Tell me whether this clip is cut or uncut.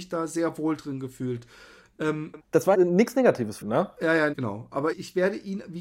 cut